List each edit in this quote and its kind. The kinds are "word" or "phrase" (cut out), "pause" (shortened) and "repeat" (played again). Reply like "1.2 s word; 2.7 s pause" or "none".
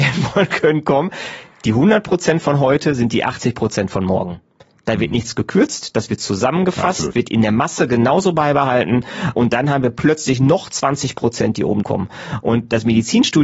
7.1 s word; 11.8 s word